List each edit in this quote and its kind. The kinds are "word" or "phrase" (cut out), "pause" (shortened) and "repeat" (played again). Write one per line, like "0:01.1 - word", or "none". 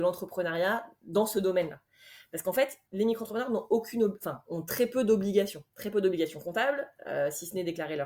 0:02.8 - pause
0:05.7 - pause

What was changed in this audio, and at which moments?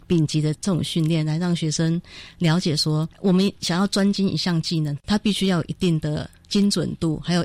0:03.1 - pause

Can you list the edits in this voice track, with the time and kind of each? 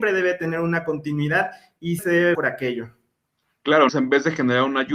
0:02.0 - word
0:02.3 - word
0:03.9 - word

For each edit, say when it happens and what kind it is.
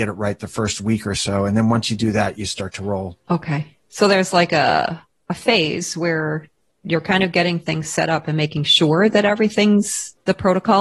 none

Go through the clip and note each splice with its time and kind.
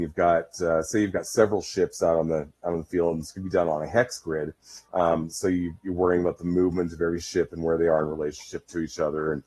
0:04.8 - pause

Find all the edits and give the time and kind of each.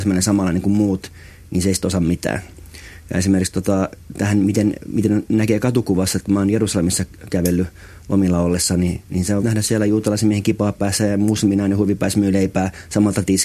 0:09.4 - word

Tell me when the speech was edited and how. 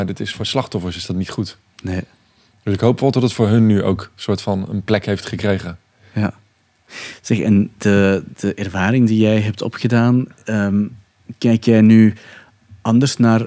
none

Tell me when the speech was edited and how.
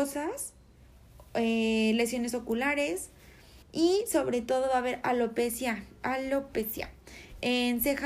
0:03.6 - pause

